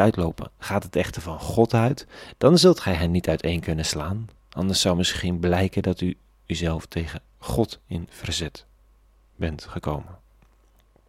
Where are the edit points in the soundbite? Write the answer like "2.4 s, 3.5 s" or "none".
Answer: none

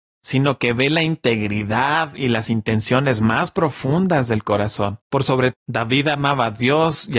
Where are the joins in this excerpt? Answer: 5.0 s, 5.5 s

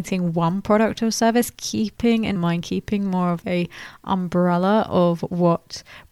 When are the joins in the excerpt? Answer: 2.4 s, 3.4 s

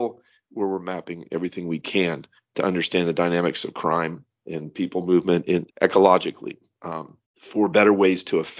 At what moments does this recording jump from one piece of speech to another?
5.7 s, 7.3 s

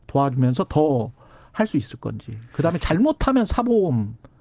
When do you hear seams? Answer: none

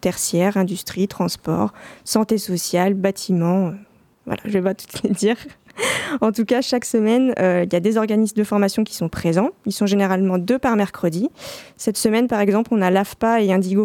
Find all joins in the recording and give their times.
none

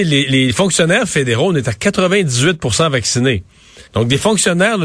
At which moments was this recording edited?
3.9 s

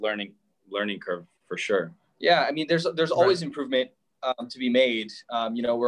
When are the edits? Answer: none

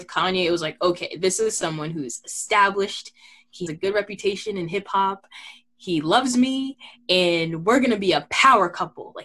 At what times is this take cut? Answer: 3.7 s

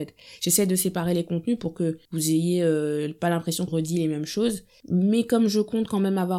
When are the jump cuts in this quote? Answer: 2.0 s, 3.7 s

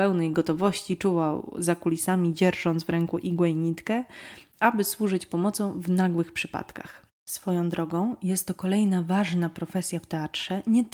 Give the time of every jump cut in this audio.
none

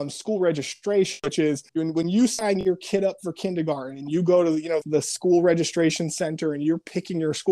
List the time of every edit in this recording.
1.7 s, 4.8 s

